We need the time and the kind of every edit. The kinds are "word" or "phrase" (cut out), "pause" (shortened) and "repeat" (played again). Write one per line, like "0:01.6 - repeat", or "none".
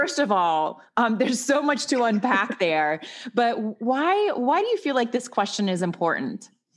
none

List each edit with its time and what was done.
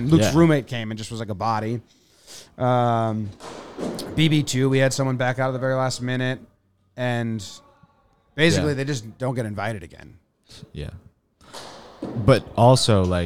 none

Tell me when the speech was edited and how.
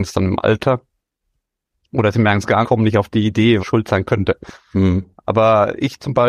0:02.6 - phrase
0:03.6 - word

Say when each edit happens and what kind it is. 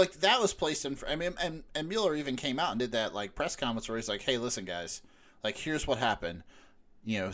none

